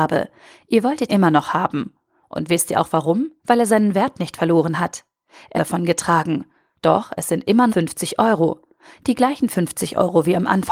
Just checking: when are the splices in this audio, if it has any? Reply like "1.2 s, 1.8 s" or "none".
1.1 s, 3.4 s, 5.6 s, 7.7 s